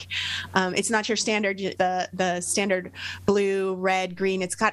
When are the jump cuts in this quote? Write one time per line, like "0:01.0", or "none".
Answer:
0:01.8